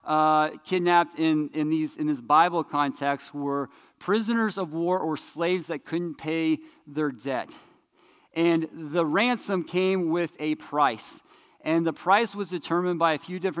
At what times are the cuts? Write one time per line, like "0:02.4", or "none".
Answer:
none